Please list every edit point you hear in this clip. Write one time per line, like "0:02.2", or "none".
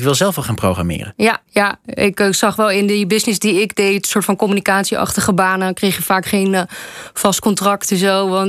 0:01.5